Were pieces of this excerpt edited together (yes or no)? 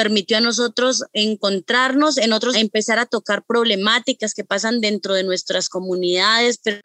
yes